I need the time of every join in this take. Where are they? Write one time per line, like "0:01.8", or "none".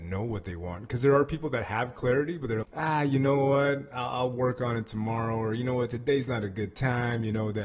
0:02.6